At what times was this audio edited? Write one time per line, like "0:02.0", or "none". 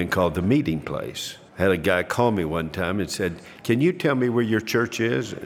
0:01.5